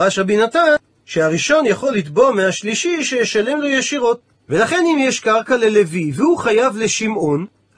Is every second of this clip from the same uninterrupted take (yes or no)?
yes